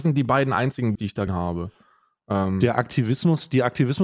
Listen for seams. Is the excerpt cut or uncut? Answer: cut